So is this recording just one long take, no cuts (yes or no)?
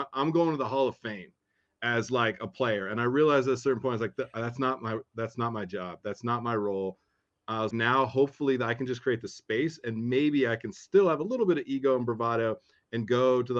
no